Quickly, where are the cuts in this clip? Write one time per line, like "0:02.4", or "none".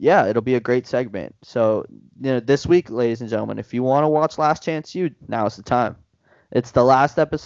none